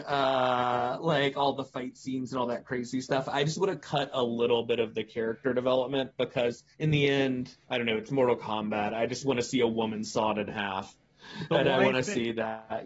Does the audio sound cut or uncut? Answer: cut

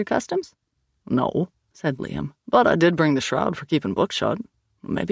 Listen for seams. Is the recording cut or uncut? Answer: uncut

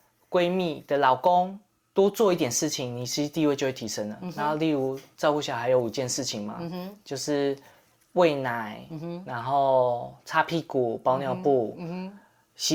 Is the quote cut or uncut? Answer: uncut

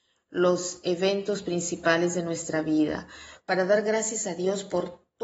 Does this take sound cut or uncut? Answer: uncut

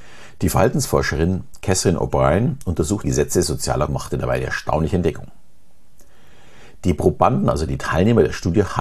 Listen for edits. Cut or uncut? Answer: cut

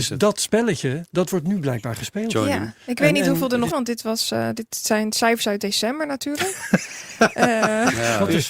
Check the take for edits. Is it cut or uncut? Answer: cut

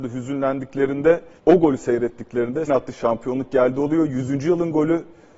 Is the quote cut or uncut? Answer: cut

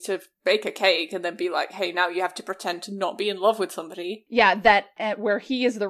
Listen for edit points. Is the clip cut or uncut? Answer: uncut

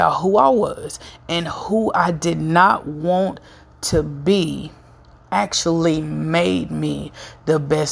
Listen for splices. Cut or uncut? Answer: uncut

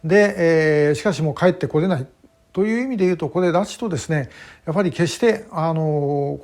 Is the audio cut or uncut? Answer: uncut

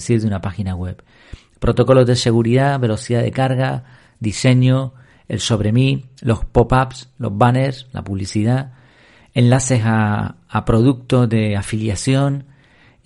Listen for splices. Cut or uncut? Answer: uncut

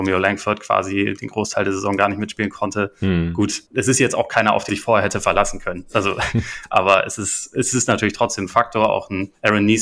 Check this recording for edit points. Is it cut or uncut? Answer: cut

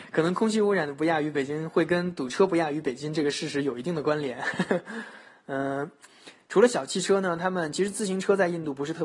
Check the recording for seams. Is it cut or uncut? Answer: uncut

